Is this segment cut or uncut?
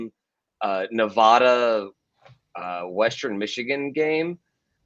uncut